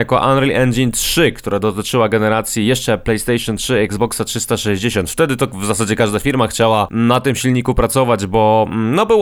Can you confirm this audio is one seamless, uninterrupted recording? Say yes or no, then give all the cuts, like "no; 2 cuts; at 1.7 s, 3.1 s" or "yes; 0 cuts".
yes; 0 cuts